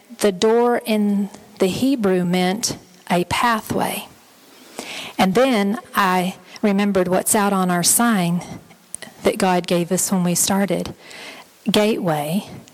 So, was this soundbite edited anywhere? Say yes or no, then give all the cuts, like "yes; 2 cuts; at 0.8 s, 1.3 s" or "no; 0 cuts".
no; 0 cuts